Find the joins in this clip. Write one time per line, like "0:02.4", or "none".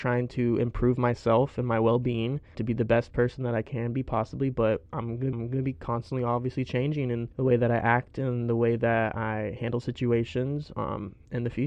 0:02.5
0:04.9
0:05.3
0:07.3